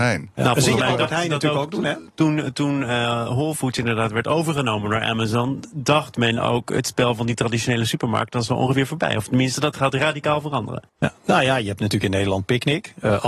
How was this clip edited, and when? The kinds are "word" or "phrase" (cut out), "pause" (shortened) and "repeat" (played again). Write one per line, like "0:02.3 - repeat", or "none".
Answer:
0:10.9 - pause